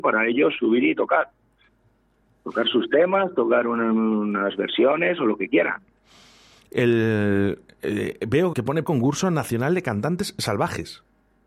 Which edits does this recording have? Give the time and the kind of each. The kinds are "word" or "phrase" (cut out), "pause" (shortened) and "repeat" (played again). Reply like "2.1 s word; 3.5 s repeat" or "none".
8.5 s word; 8.8 s word